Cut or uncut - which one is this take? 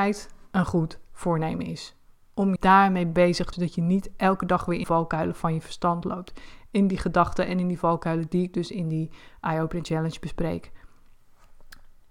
cut